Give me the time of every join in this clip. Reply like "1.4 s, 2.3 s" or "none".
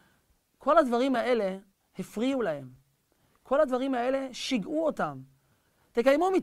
none